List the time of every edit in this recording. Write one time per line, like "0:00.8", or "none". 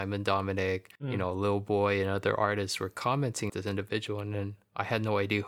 0:01.0
0:03.5